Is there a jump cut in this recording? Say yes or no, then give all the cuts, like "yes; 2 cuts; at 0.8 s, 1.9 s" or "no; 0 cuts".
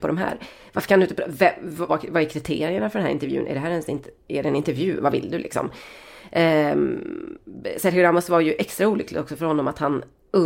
yes; 1 cut; at 1.9 s